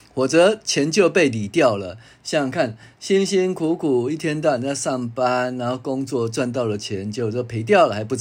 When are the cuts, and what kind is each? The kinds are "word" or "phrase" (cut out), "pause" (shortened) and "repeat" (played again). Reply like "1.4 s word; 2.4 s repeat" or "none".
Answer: none

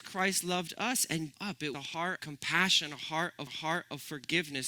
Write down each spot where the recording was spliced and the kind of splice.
1.3 s phrase; 1.7 s word; 2.2 s word; 3.5 s repeat

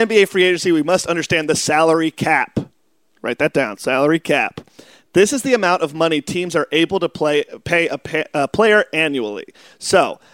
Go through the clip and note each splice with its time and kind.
none

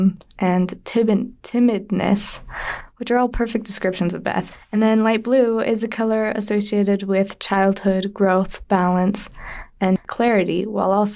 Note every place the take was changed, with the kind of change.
none

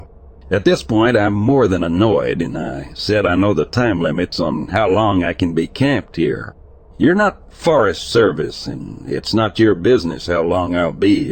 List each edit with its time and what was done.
none

